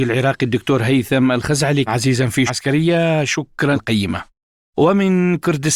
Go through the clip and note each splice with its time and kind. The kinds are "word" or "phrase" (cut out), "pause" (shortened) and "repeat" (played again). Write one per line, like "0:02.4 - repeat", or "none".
0:01.9 - phrase
0:02.5 - word
0:03.7 - word